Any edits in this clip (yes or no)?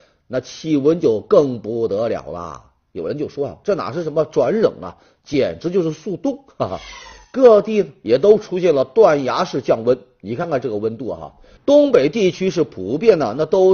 no